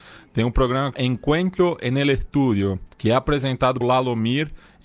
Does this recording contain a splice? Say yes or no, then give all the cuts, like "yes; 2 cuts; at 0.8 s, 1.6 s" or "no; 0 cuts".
yes; 3 cuts; at 0.9 s, 2.9 s, 3.8 s